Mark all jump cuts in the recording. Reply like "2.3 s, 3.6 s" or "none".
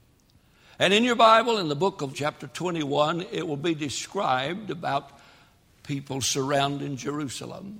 2.1 s